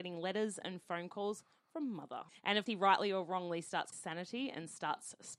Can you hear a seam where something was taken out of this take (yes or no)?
yes